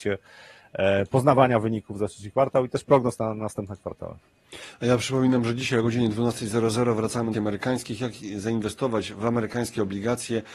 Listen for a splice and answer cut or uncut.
cut